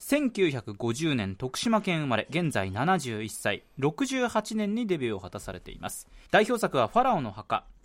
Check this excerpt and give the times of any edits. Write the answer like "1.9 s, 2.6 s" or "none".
6.3 s